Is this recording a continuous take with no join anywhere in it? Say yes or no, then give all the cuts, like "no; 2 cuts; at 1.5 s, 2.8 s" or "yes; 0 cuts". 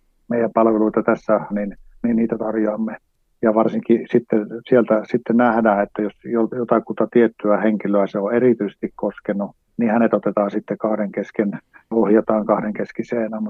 no; 3 cuts; at 1.5 s, 9.6 s, 11.9 s